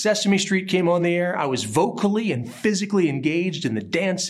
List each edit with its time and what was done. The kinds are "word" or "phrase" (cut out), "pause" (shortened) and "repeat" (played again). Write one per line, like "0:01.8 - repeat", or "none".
none